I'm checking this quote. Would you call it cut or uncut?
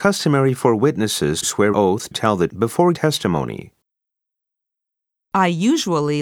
cut